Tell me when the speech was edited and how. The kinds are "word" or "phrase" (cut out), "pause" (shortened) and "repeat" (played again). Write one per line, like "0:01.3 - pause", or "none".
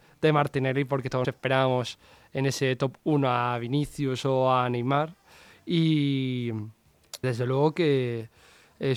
0:01.2 - word
0:07.2 - word